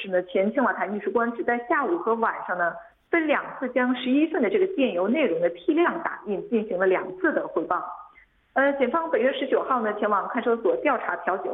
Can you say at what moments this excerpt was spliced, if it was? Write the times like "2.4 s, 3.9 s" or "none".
none